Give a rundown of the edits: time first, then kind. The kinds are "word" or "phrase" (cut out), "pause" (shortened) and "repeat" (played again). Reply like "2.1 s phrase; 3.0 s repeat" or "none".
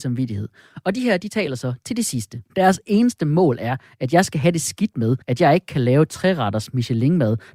2.5 s pause; 5.2 s pause